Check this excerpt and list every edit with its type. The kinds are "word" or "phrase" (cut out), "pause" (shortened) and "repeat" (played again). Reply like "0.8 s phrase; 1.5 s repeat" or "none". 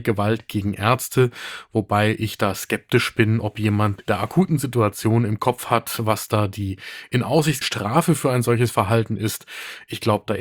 4.0 s word; 7.6 s word